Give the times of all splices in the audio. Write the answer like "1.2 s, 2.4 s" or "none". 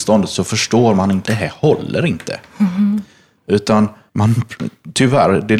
1.2 s, 4.1 s